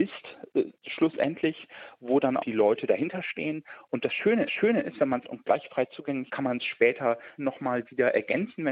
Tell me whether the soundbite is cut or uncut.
cut